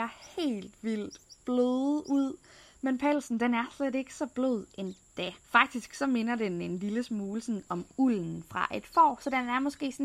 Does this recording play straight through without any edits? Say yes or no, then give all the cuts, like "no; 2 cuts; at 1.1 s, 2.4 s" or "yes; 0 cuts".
no; 1 cut; at 5.4 s